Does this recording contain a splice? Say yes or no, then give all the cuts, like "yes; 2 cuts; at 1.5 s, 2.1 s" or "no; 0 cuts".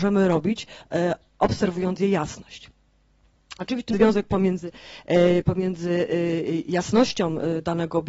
yes; 1 cut; at 3.9 s